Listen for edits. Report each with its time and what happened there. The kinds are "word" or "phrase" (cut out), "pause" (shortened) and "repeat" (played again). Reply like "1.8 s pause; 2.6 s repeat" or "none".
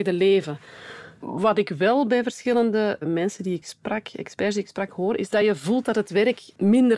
none